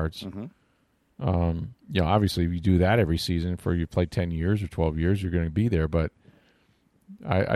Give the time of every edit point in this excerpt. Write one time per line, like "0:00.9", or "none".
0:01.8